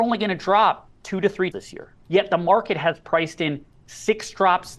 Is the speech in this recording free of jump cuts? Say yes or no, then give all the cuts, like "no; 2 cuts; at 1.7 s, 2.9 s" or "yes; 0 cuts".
no; 2 cuts; at 1.5 s, 2.0 s